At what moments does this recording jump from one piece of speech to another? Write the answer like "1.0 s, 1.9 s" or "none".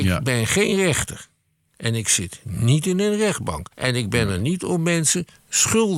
3.7 s

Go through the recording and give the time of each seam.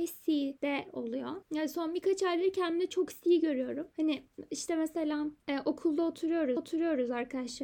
1.4 s, 6.6 s

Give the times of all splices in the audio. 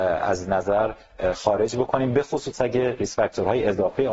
none

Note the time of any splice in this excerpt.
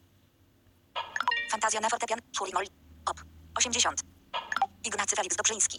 2.5 s

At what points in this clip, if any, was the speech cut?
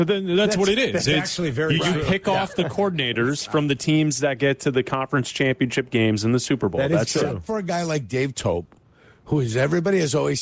none

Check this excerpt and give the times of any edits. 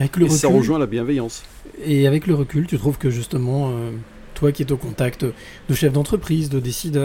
none

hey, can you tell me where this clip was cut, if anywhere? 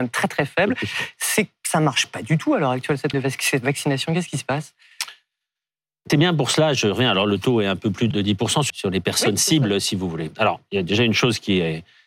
3.1 s, 6.1 s, 8.1 s, 8.7 s

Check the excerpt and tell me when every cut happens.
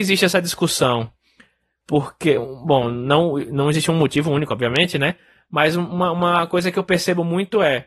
none

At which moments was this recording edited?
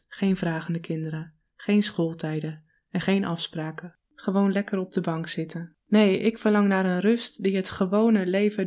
4.0 s, 5.8 s

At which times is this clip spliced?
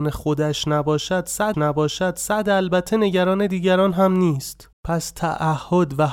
1.5 s, 4.7 s

